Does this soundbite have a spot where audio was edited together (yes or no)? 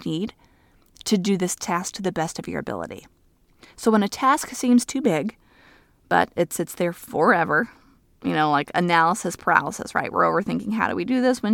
no